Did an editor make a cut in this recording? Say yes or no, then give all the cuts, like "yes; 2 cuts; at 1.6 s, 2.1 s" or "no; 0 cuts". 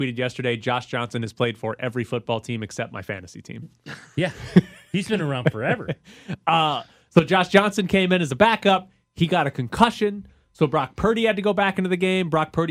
no; 0 cuts